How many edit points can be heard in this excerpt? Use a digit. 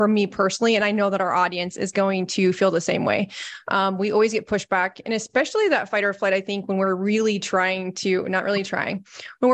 0